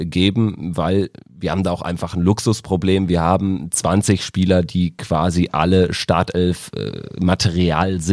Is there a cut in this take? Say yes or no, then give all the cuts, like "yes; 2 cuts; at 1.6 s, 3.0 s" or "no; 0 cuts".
no; 0 cuts